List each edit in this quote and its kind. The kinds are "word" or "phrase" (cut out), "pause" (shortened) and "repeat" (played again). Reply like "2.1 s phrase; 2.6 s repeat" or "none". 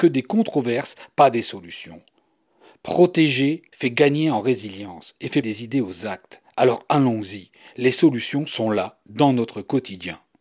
3.7 s pause; 5.4 s word